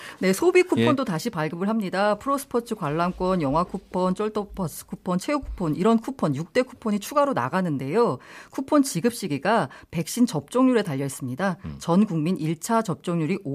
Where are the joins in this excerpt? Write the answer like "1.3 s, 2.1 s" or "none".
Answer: none

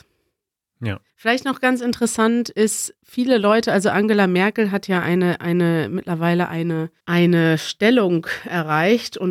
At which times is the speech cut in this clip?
1.1 s, 3.0 s, 7.0 s

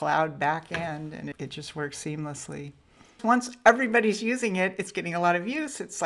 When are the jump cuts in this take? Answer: none

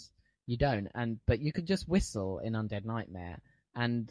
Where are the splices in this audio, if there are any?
none

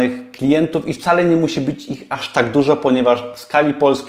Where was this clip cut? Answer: none

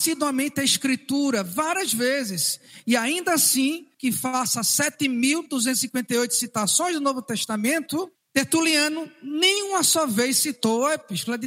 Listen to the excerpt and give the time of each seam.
3.9 s, 8.2 s

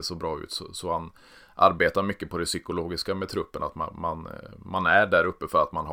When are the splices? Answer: none

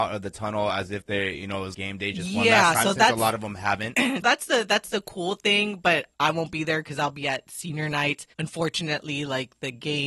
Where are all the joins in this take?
1.7 s, 4.2 s, 6.1 s, 8.3 s

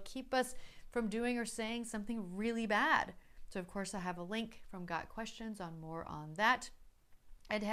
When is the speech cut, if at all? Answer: none

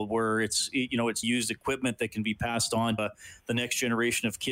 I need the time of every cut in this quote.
1.2 s, 3.0 s

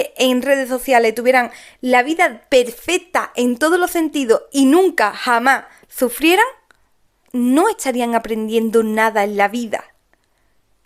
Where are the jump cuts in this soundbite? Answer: 7.2 s

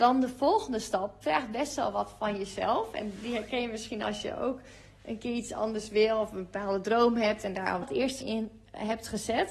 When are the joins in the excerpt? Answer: 1.2 s, 7.8 s, 8.2 s

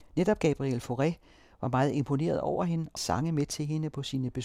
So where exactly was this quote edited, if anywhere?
3.0 s

